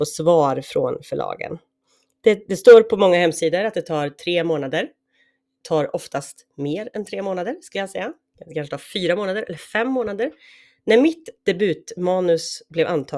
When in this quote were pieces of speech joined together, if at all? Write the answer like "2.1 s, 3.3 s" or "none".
11.4 s